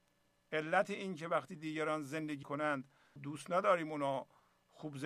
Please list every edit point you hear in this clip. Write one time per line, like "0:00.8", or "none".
0:02.4
0:03.2